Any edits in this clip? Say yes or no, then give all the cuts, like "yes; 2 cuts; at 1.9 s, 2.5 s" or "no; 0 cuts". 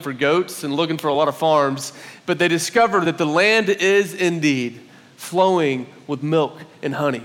no; 0 cuts